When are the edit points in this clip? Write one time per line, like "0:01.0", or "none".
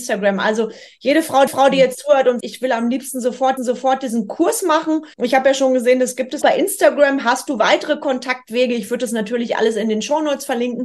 0:01.5
0:02.4
0:03.6
0:05.1
0:06.4